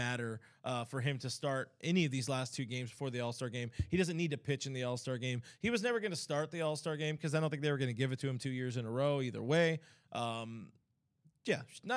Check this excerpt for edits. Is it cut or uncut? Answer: uncut